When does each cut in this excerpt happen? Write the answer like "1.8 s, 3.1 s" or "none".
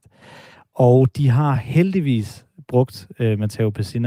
none